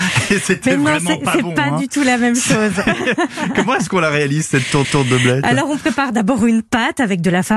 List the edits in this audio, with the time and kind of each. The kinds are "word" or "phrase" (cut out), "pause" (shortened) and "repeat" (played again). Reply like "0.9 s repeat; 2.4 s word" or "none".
4.8 s repeat